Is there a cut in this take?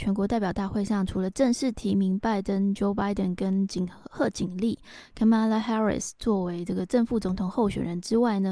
no; 0 cuts

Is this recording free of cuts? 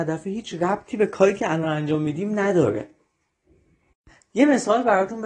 yes; 0 cuts

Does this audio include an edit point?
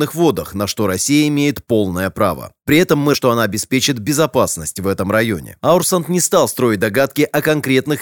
yes; 1 cut; at 3.1 s

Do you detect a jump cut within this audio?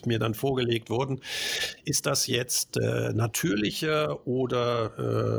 no; 0 cuts

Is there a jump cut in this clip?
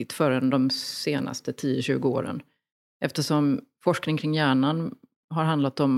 no; 0 cuts

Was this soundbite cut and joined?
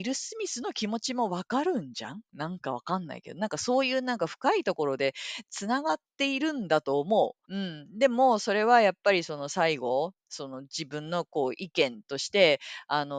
yes; 1 cut; at 7.4 s

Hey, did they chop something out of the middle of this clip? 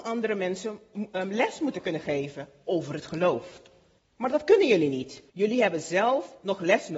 yes; 2 cuts; at 4.0 s, 5.3 s

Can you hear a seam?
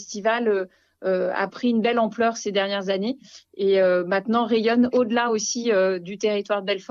no; 0 cuts

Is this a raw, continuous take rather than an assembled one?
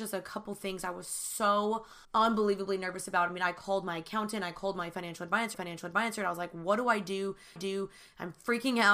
no; 3 cuts; at 2.0 s, 5.5 s, 7.6 s

